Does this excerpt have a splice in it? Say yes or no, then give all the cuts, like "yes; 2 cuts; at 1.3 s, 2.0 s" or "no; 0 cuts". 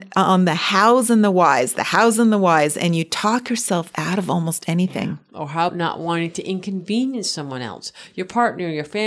yes; 1 cut; at 5.7 s